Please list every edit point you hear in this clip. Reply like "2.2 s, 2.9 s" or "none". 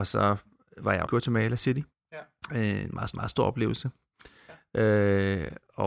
1.0 s, 1.9 s, 3.1 s